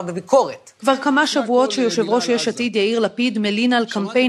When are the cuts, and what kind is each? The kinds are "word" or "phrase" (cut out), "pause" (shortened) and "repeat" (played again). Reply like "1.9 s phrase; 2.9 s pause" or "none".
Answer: none